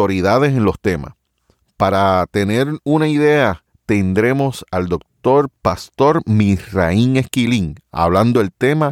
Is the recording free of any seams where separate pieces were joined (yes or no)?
yes